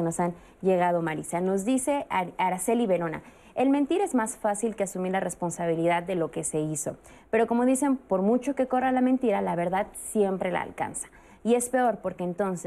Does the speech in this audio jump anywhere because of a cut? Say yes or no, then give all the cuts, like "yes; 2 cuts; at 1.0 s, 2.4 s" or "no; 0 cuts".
no; 0 cuts